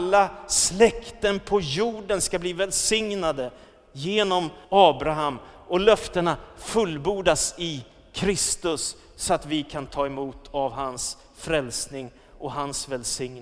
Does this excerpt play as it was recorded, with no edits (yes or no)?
no